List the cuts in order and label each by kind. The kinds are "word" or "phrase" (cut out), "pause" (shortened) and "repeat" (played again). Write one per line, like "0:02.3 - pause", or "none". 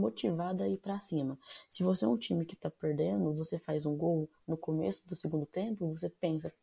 none